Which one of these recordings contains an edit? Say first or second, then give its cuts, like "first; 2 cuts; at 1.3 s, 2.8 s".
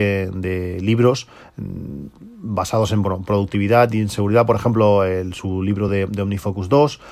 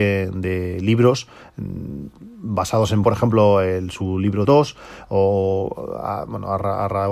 second; 2 cuts; at 3.0 s, 4.4 s